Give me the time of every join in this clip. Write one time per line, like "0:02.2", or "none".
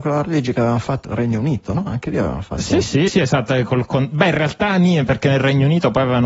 0:01.0
0:03.1